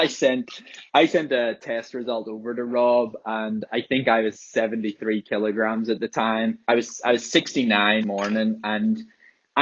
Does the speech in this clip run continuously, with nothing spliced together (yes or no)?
no